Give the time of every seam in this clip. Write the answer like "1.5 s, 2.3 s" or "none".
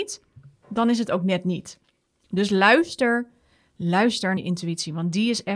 4.4 s

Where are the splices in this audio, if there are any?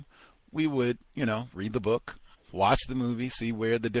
2.3 s

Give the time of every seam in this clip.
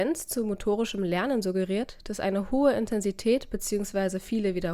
none

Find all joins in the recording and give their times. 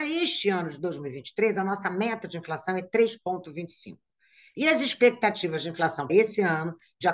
6.1 s

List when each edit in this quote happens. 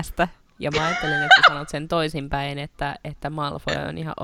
none

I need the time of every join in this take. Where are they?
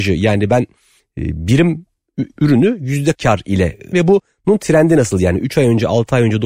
2.4 s, 3.1 s, 3.9 s

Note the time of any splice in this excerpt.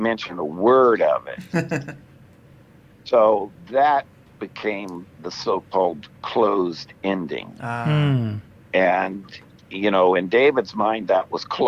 none

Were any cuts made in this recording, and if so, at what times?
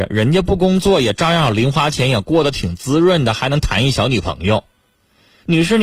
none

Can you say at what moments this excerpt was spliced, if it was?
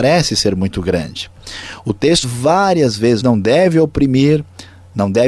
2.2 s, 3.2 s

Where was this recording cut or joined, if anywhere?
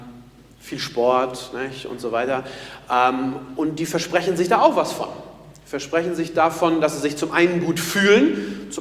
none

